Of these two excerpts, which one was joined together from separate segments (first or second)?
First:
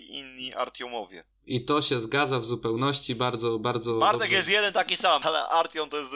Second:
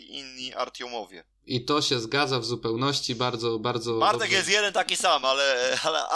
first